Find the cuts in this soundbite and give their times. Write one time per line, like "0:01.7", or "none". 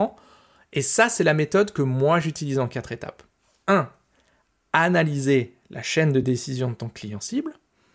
none